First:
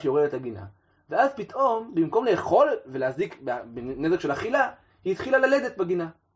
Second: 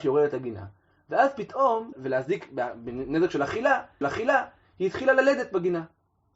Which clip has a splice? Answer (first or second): second